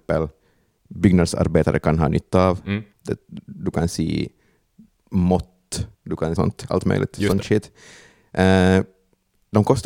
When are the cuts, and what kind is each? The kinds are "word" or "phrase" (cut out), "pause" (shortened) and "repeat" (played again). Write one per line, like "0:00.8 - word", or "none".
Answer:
0:02.9 - pause
0:05.9 - pause
0:06.4 - phrase